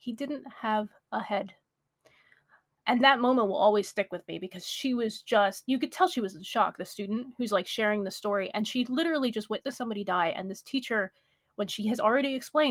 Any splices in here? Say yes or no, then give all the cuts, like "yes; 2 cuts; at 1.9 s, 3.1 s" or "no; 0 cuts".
no; 0 cuts